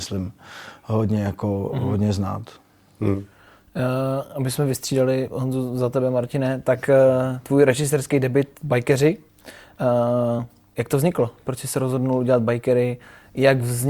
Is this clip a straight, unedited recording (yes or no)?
yes